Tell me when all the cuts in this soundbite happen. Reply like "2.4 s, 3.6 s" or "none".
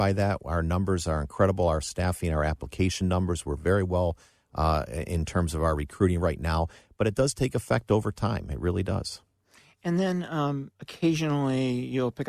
none